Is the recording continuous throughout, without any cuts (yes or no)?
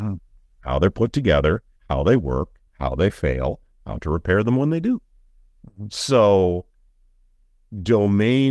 no